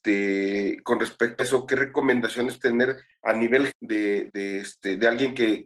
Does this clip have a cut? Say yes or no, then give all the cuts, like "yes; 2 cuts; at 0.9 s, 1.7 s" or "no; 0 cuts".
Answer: yes; 4 cuts; at 1.4 s, 2.6 s, 3.7 s, 4.3 s